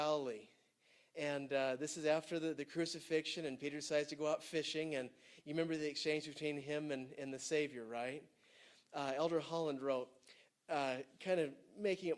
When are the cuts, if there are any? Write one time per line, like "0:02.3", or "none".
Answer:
none

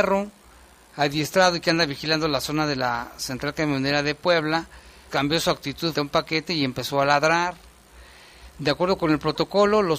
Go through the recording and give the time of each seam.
0:05.1
0:05.9

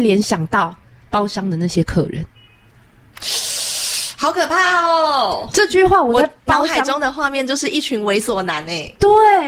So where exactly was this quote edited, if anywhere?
0:01.0

